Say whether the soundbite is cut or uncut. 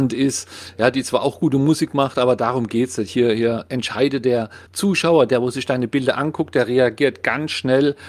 cut